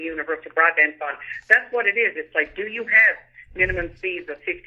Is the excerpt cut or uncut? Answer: uncut